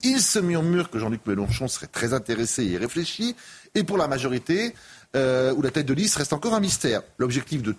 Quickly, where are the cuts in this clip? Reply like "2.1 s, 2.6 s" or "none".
none